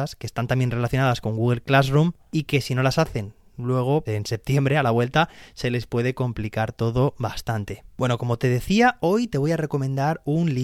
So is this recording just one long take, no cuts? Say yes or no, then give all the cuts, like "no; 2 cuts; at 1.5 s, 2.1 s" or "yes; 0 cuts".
no; 1 cut; at 4.1 s